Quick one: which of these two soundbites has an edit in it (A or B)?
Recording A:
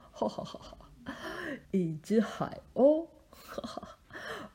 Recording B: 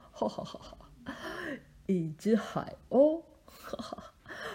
A